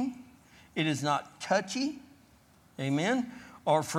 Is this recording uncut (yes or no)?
yes